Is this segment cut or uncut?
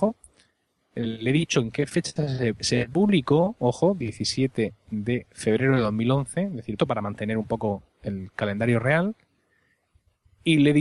cut